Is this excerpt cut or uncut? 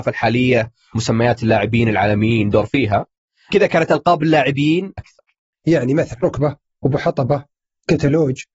cut